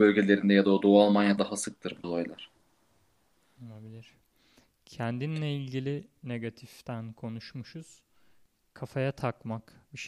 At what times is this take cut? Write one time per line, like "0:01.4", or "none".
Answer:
0:01.4
0:02.0